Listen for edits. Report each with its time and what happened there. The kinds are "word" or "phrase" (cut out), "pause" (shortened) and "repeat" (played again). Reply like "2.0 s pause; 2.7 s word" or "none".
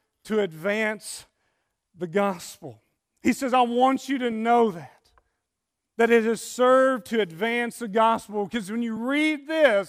none